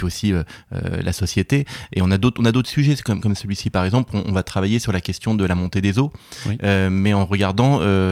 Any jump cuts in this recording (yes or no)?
no